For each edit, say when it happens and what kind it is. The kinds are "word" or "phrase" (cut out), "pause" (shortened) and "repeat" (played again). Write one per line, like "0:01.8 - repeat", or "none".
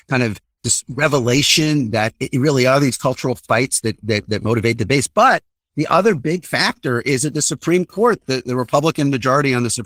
none